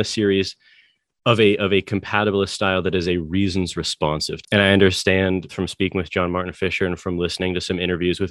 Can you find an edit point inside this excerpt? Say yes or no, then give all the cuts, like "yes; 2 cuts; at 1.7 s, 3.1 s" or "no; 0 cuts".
yes; 2 cuts; at 4.4 s, 5.5 s